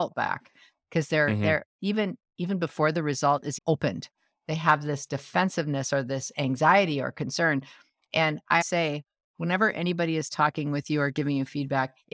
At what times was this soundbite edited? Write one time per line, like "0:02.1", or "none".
0:03.6
0:08.6